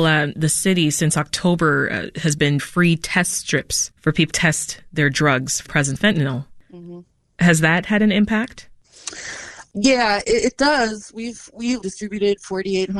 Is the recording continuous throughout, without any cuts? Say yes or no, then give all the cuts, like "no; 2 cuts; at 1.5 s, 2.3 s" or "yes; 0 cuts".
no; 6 cuts; at 2.6 s, 4.3 s, 5.6 s, 6.0 s, 10.2 s, 11.8 s